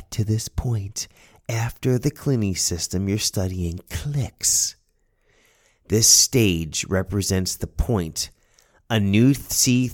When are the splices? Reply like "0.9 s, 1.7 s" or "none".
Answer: none

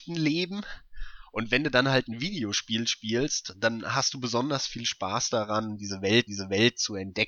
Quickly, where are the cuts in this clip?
6.3 s

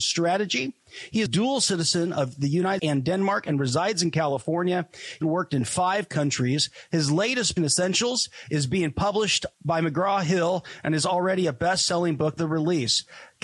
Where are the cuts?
1.3 s, 2.8 s, 5.2 s, 7.6 s, 9.5 s, 12.4 s

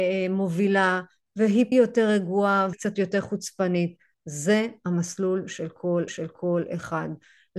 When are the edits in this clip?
1.7 s, 2.7 s, 6.1 s

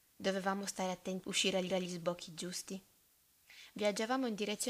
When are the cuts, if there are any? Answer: 1.2 s, 1.7 s

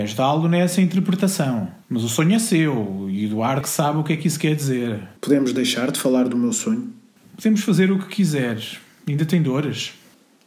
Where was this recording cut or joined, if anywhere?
1.8 s, 3.6 s, 5.2 s

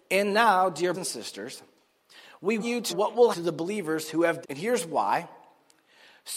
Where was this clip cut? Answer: 0.9 s, 2.6 s, 2.9 s, 3.3 s, 4.4 s

